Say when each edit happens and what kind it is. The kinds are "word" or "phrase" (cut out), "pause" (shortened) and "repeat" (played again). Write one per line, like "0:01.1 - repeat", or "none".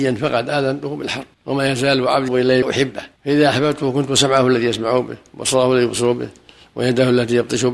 0:01.3 - pause
0:02.3 - word
0:02.6 - phrase
0:03.2 - pause